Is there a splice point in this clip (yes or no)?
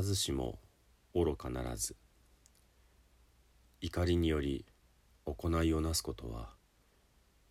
no